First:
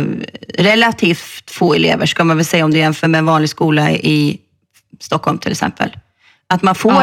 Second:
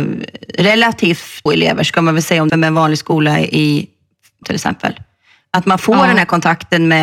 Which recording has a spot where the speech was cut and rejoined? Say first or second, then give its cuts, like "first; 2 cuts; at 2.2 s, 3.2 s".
second; 3 cuts; at 1.5 s, 2.5 s, 4.4 s